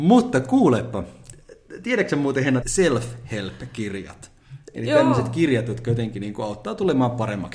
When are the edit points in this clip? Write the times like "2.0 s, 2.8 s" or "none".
2.6 s